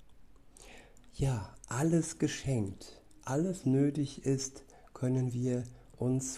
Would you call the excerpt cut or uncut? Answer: cut